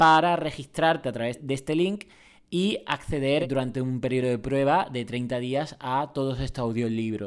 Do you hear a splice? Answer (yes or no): no